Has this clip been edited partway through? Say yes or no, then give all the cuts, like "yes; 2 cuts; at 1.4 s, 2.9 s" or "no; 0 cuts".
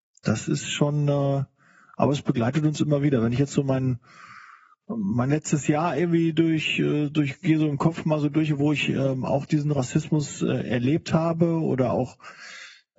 no; 0 cuts